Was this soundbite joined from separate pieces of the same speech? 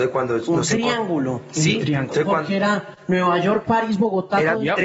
no; 0 cuts

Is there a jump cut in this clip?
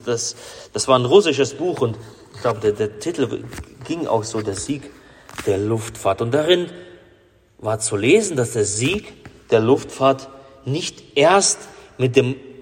no; 0 cuts

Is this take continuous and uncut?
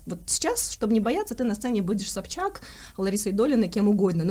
yes; 0 cuts

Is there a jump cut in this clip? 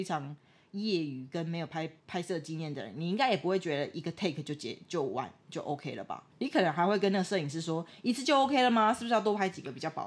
yes; 2 cuts; at 2.0 s, 6.3 s

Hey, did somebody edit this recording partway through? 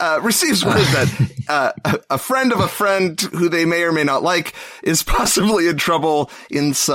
no; 0 cuts

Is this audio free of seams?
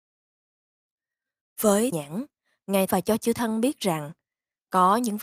no; 2 cuts; at 1.9 s, 2.9 s

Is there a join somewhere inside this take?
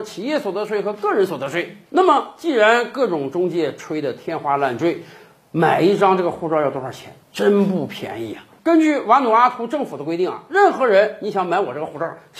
yes; 2 cuts; at 7.2 s, 8.6 s

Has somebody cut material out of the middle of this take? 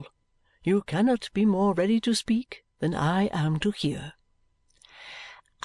no; 0 cuts

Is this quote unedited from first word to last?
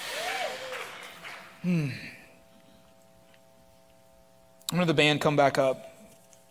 yes; 0 cuts

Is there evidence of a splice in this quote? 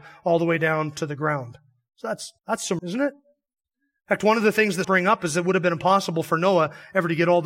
yes; 3 cuts; at 2.4 s, 2.8 s, 4.8 s

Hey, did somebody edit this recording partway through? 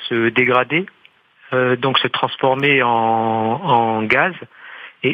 no; 0 cuts

